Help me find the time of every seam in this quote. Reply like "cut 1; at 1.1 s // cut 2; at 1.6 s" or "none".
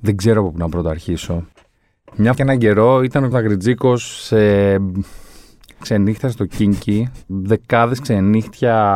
cut 1; at 2.3 s // cut 2; at 3.3 s // cut 3; at 5.8 s // cut 4; at 7.3 s